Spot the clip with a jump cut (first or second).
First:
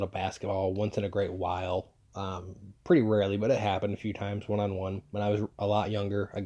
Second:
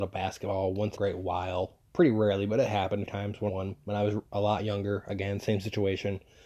second